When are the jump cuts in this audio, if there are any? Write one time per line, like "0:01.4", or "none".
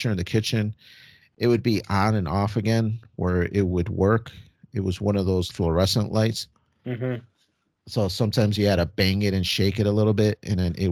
0:05.5